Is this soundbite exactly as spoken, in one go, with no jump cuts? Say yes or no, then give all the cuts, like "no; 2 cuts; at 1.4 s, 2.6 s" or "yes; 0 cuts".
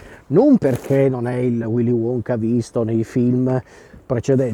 yes; 0 cuts